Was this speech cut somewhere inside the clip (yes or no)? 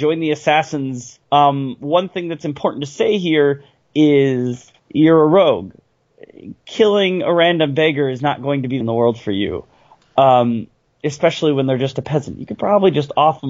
yes